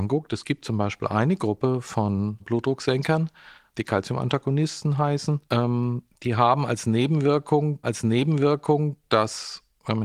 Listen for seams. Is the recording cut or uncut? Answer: cut